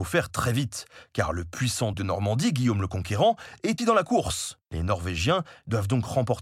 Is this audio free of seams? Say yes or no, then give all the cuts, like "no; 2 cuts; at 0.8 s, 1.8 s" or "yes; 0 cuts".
no; 3 cuts; at 1.9 s, 3.8 s, 4.6 s